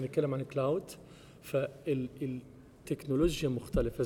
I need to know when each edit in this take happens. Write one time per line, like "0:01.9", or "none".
0:02.8

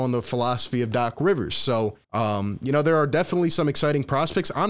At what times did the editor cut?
0:02.0

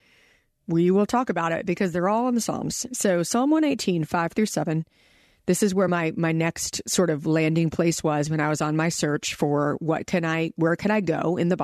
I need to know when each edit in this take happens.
none

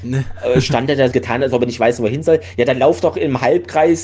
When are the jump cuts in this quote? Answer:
0:01.1

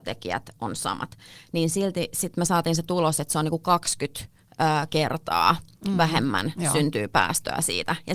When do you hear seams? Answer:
0:04.4

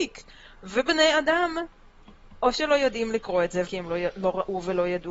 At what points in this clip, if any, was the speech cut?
0:03.7

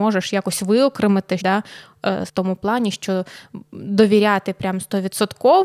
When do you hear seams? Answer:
0:01.4
0:02.3

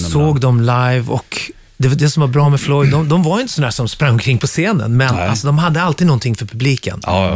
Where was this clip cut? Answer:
none

